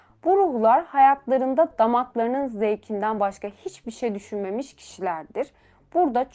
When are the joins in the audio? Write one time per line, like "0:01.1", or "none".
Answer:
none